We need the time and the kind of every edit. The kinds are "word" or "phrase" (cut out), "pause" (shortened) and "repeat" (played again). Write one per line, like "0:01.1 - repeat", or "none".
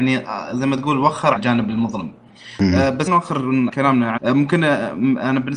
0:01.4 - word
0:03.1 - word
0:03.7 - word
0:04.2 - word

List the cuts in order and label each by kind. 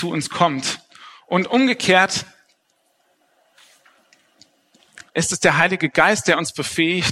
0:05.1 - pause

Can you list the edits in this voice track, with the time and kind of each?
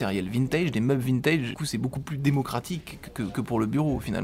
0:01.5 - word

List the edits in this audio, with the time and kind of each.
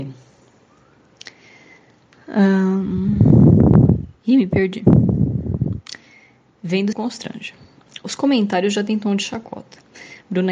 0:06.9 - phrase

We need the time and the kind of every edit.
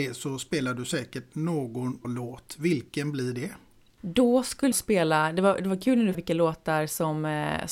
0:02.0 - word
0:04.7 - word
0:06.1 - word

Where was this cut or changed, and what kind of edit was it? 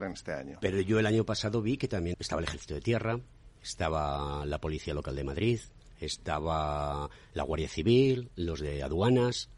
0:02.1 - word

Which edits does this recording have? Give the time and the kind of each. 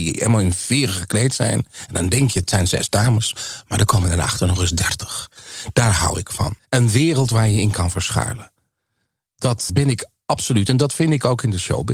0:06.6 - pause
0:09.7 - word

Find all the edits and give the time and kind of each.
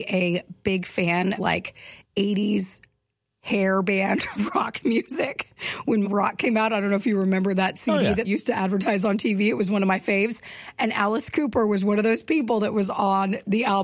0:01.4 - word
0:02.0 - pause
0:06.0 - word
0:08.2 - word

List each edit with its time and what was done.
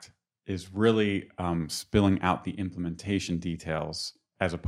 none

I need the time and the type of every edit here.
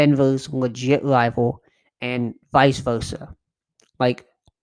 none

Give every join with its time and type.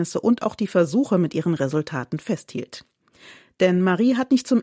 none

